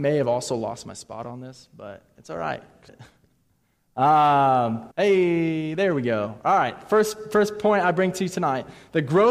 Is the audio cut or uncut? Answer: cut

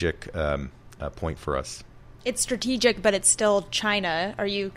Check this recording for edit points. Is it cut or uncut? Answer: uncut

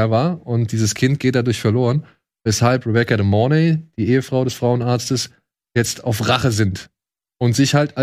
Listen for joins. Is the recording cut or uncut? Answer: uncut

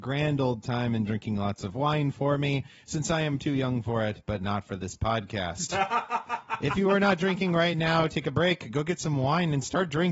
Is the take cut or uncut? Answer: uncut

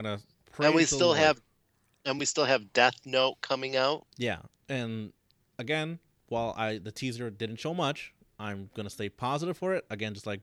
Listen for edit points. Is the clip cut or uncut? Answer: uncut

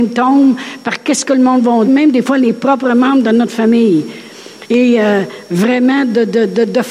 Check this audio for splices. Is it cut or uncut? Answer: cut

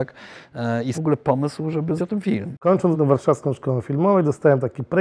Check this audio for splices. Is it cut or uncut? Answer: cut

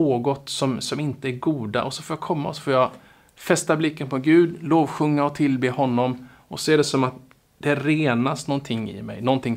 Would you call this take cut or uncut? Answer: uncut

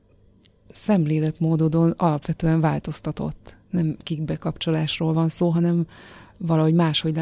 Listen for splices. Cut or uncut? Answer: uncut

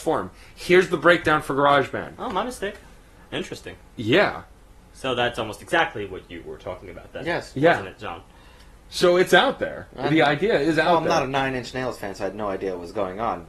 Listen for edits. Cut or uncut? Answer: uncut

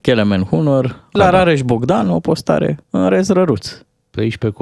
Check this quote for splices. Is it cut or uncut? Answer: cut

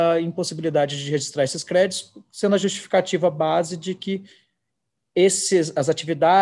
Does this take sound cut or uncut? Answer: uncut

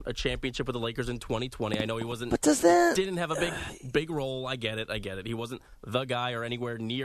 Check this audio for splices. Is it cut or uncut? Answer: uncut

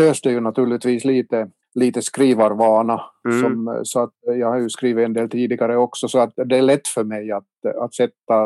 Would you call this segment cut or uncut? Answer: cut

